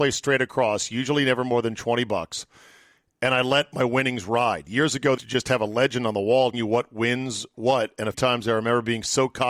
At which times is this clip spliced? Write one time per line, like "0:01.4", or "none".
0:05.2
0:06.5
0:08.1